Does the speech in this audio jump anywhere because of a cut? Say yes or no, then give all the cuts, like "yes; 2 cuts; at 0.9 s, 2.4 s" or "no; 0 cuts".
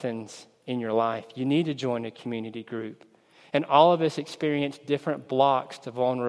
no; 0 cuts